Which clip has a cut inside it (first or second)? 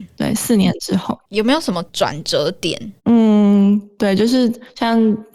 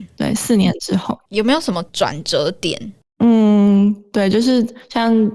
first